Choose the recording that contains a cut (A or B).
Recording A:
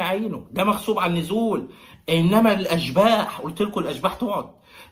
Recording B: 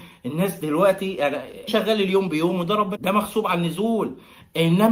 B